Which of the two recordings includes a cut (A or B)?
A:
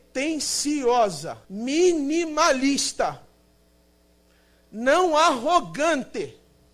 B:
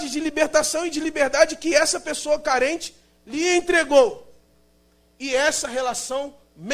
A